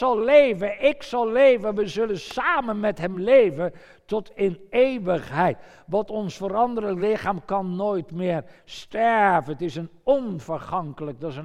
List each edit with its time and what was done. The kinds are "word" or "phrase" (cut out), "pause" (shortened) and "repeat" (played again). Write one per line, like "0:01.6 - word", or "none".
none

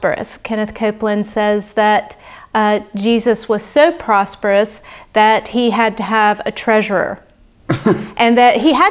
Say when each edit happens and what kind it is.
none

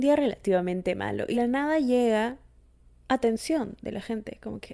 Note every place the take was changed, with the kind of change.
0:01.3 - word

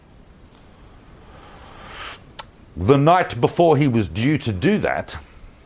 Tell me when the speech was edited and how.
none

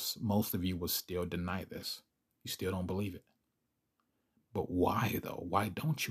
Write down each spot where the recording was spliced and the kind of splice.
none

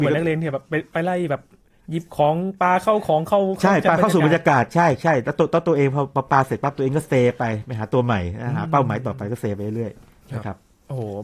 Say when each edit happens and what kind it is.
none

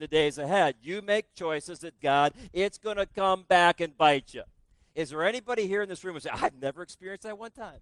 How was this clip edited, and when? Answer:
0:02.0 - word

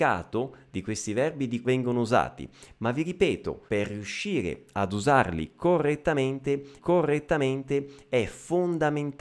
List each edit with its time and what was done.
0:01.6 - word
0:03.7 - pause
0:06.8 - repeat

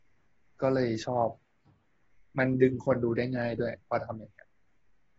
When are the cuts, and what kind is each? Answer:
none

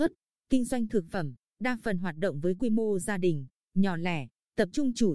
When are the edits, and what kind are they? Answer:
none

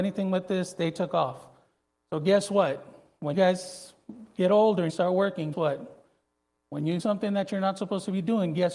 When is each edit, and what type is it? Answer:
0:03.3 - word
0:04.9 - word
0:05.5 - word
0:07.0 - word

